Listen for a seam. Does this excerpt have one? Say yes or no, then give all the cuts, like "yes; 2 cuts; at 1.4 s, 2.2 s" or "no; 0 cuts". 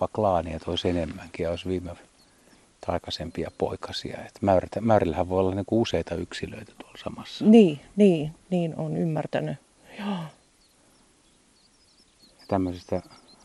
no; 0 cuts